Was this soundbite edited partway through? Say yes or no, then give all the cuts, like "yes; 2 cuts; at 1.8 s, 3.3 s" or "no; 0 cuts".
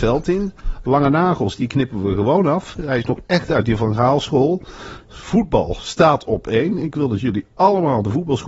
no; 0 cuts